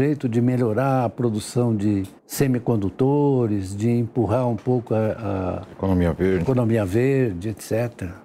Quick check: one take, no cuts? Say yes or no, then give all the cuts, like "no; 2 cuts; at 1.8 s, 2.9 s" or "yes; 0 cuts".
no; 1 cut; at 2.2 s